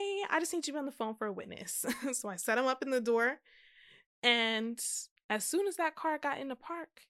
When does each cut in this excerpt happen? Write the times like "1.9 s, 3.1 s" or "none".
none